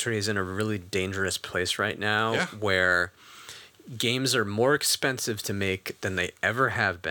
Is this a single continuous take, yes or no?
yes